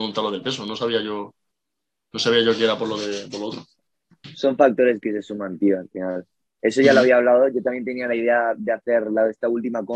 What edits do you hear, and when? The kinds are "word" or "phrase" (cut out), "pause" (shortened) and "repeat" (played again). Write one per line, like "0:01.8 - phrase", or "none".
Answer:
none